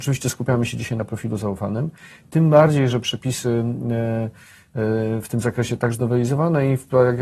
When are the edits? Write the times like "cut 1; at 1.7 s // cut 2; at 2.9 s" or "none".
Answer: cut 1; at 5.9 s